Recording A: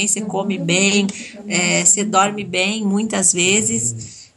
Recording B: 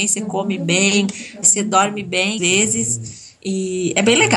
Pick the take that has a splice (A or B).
B